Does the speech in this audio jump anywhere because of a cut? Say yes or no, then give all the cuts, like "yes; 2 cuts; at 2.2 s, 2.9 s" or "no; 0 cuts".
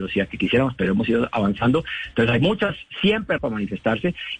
yes; 1 cut; at 3.4 s